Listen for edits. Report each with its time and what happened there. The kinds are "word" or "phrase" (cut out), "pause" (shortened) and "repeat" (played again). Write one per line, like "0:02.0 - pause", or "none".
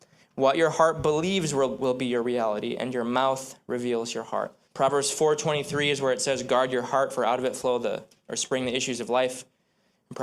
0:04.6 - pause